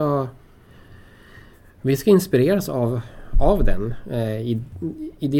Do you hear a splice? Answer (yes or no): no